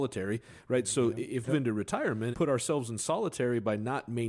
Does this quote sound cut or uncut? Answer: cut